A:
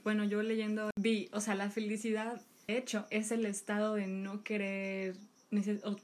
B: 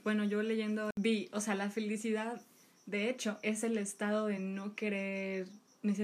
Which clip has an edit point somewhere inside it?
A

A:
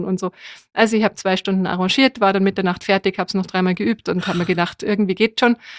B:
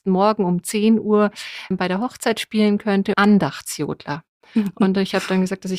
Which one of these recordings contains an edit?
B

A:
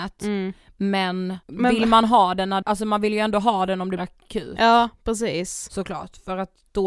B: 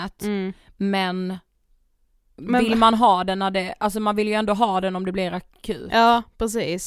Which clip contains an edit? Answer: A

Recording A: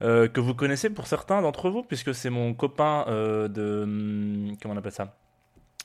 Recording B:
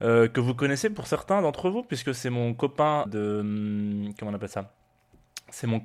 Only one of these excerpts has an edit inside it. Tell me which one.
B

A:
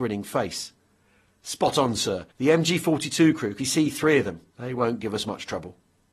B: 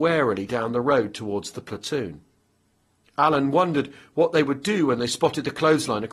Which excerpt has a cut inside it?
A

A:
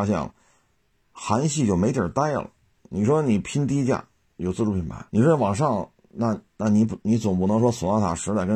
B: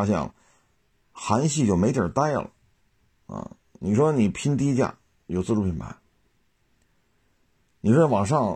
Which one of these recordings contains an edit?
A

